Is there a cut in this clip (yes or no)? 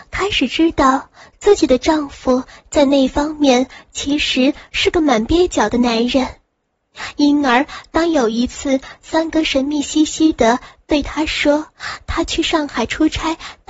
no